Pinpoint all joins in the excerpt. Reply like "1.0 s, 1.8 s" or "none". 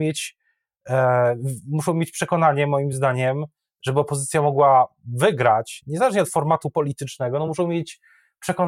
none